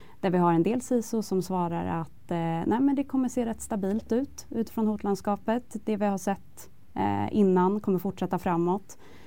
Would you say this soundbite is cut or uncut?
uncut